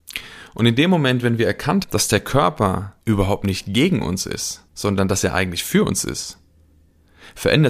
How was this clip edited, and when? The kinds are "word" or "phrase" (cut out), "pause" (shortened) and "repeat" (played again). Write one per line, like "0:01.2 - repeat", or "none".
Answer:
0:01.8 - word
0:03.0 - pause
0:04.7 - pause